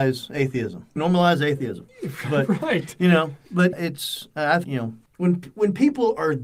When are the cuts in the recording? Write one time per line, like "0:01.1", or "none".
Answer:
0:01.0
0:03.7
0:04.6